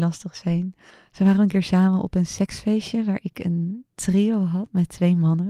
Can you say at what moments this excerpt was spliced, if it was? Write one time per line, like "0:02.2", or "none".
0:00.9